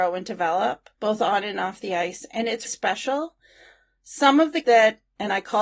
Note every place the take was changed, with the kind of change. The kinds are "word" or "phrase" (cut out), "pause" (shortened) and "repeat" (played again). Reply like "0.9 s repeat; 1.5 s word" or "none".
0.9 s pause; 2.7 s word; 4.6 s word